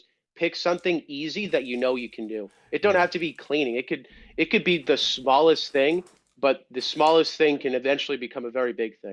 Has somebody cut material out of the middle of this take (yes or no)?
no